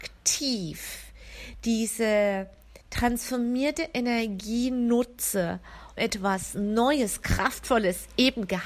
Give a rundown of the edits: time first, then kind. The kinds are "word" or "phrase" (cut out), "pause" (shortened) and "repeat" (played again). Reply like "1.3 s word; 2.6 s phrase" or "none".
2.8 s pause; 6.0 s word